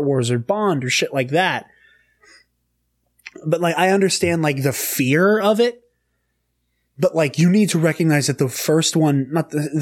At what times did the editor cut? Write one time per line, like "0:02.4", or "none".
none